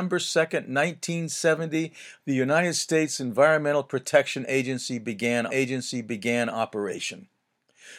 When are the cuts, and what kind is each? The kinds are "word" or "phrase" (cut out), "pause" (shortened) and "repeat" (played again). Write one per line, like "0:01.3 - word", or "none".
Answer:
0:05.5 - repeat